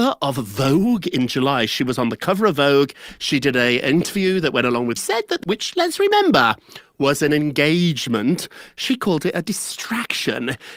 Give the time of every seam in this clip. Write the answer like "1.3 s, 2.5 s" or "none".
5.0 s, 5.4 s